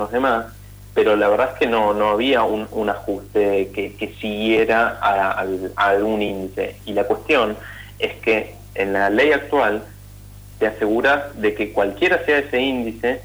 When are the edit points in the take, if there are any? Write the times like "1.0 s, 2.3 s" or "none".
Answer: none